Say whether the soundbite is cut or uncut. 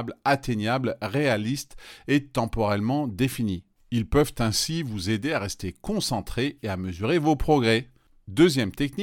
uncut